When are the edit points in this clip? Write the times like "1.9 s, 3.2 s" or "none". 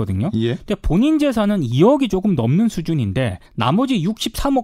3.5 s